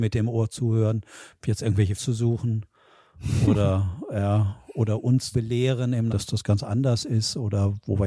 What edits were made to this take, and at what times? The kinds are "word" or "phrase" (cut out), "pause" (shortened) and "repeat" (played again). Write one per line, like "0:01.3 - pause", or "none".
0:02.0 - word
0:05.3 - word
0:06.1 - word